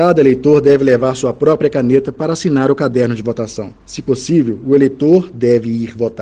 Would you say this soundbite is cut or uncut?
uncut